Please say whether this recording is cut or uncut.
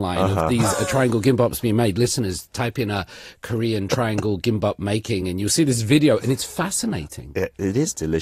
uncut